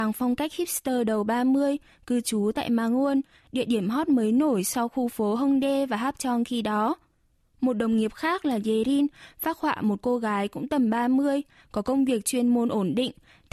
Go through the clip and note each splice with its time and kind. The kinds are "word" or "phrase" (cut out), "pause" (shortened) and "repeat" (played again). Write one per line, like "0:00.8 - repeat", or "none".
none